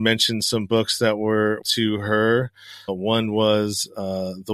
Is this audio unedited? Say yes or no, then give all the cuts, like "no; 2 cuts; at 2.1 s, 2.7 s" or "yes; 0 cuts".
no; 2 cuts; at 1.6 s, 2.9 s